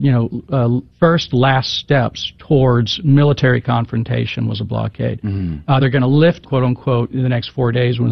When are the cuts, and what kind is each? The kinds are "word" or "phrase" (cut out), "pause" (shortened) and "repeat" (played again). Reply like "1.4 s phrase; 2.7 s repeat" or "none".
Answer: 0.9 s pause; 5.8 s word; 6.4 s word; 7.1 s word